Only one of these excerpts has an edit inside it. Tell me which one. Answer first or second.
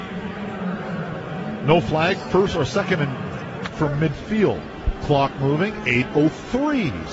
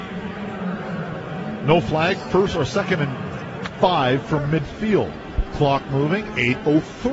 first